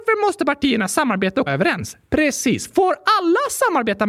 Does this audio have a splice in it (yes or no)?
yes